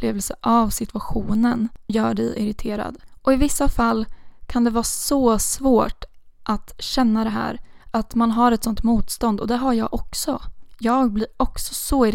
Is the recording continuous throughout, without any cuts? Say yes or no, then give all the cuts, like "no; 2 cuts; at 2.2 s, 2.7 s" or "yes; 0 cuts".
no; 3 cuts; at 1.9 s, 7.8 s, 8.8 s